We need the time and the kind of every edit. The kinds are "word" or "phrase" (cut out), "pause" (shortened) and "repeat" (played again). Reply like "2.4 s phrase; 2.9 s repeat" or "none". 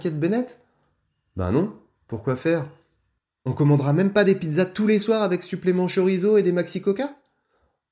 none